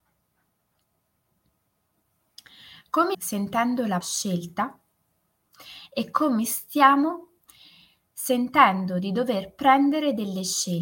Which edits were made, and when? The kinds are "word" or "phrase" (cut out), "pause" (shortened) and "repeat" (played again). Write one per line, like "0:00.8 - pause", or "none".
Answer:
0:03.1 - word
0:04.0 - word